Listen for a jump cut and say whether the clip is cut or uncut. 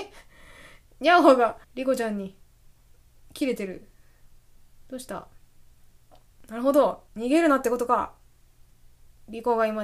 cut